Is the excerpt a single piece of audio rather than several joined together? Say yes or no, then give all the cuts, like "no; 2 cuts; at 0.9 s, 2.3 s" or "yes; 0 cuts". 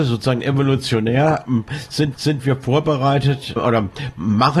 no; 2 cuts; at 2.1 s, 3.6 s